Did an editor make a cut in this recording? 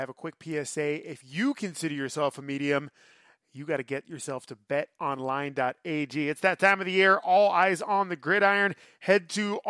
no; 0 cuts

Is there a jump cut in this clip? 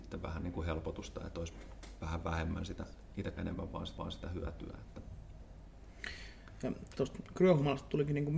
yes; 2 cuts; at 3.4 s, 4.0 s

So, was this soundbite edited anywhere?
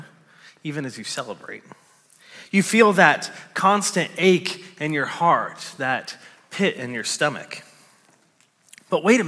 no; 0 cuts

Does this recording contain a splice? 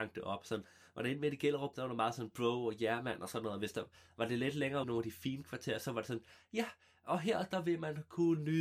yes; 2 cuts; at 1.7 s, 4.8 s

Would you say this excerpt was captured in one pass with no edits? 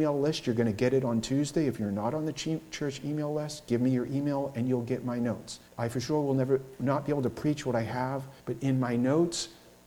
no; 2 cuts; at 5.7 s, 8.4 s

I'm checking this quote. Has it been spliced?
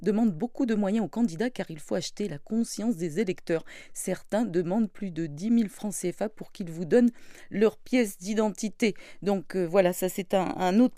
no; 0 cuts

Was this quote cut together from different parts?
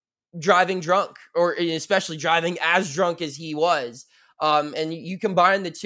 no; 0 cuts

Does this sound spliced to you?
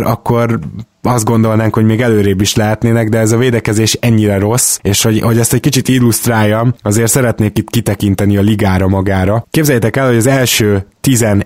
no; 0 cuts

